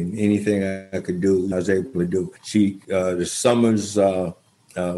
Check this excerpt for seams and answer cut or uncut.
cut